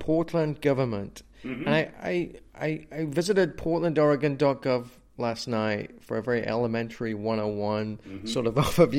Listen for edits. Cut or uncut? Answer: uncut